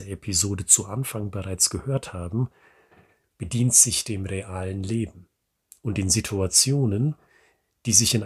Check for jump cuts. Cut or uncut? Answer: uncut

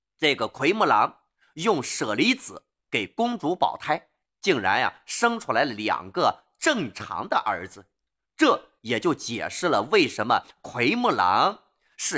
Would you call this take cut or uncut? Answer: uncut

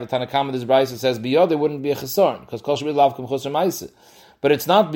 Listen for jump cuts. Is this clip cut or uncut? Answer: uncut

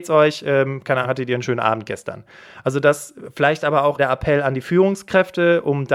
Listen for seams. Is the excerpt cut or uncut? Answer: cut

